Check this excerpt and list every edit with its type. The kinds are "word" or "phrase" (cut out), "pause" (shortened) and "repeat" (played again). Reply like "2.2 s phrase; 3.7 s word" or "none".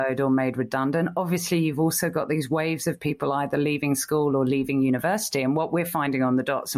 none